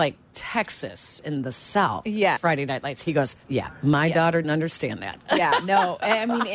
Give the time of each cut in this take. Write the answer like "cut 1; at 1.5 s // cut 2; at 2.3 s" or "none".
cut 1; at 2.4 s // cut 2; at 3.4 s // cut 3; at 4.4 s